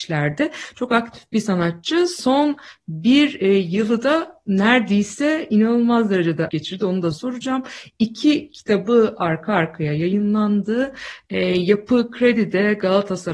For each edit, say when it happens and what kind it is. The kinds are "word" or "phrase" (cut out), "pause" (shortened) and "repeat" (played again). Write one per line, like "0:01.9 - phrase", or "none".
0:06.5 - word
0:07.1 - word